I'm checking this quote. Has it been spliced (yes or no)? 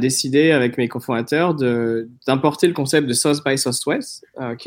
no